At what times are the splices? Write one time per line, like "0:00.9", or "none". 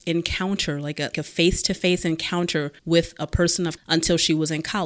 0:01.1
0:02.8
0:03.8

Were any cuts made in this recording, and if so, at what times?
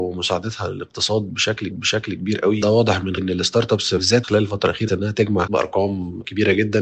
0:01.7
0:02.6
0:03.2
0:04.2
0:04.9
0:05.5

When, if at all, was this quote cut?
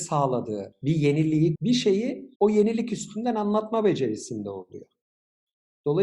0:01.5
0:02.3

